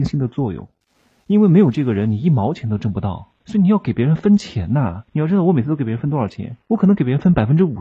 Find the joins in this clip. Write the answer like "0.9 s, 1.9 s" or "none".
3.4 s, 5.1 s, 6.6 s